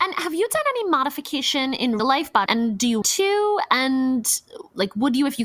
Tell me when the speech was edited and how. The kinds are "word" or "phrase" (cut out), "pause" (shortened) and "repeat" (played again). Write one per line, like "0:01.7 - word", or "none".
0:02.0 - word
0:02.5 - word
0:03.0 - word